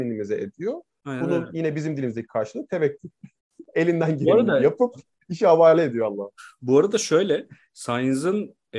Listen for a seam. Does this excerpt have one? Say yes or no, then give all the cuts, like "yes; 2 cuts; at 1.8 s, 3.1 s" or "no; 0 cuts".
no; 0 cuts